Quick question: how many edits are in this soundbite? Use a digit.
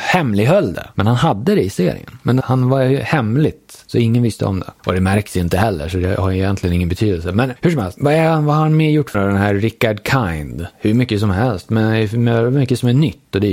2